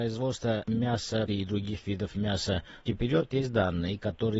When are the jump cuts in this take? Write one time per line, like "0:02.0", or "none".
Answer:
0:01.3
0:02.9